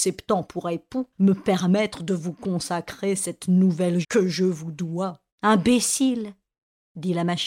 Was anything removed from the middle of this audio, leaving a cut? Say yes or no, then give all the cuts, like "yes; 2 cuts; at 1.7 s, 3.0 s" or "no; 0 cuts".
yes; 3 cuts; at 1.1 s, 4.0 s, 5.3 s